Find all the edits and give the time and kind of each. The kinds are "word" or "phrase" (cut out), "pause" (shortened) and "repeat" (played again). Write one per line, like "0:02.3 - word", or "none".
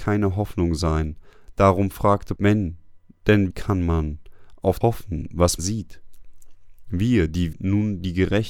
0:02.4 - word
0:03.5 - word
0:04.8 - word
0:05.6 - word
0:07.5 - word